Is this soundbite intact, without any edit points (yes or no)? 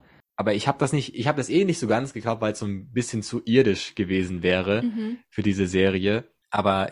yes